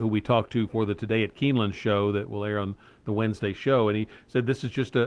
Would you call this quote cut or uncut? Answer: uncut